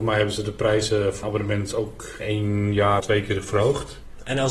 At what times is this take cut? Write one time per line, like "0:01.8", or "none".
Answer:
0:01.2
0:02.2
0:03.0